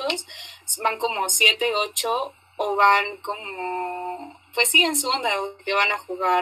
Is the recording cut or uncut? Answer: uncut